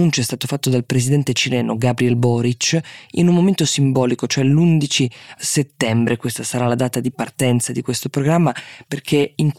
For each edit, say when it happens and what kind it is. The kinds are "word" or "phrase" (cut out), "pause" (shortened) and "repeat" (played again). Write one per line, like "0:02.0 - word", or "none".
none